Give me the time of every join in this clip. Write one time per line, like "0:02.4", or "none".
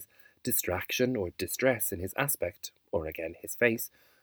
none